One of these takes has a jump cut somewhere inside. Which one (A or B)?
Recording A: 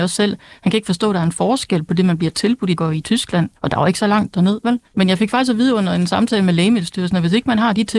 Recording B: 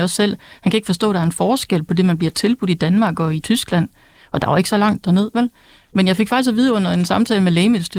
A